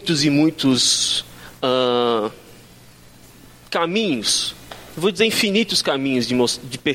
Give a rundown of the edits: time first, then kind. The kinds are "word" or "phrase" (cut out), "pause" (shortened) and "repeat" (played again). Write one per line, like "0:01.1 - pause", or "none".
none